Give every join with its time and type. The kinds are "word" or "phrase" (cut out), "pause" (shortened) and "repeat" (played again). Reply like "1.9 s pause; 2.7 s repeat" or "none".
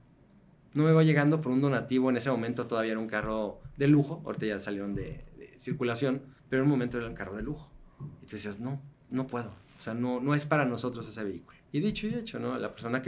6.4 s pause; 11.7 s pause

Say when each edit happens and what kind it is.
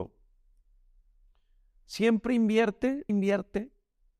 3.1 s word

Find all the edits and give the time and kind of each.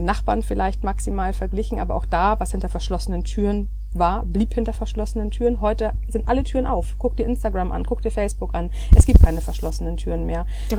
none

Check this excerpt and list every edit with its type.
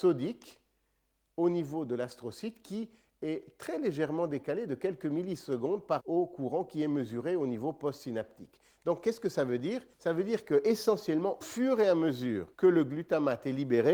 6.0 s word; 9.9 s pause; 11.4 s word; 12.5 s pause

